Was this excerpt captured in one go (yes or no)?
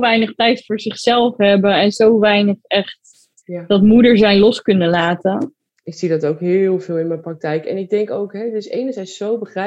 yes